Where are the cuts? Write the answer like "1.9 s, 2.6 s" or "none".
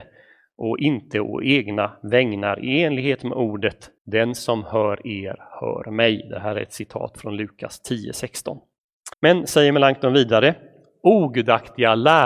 4.0 s, 9.1 s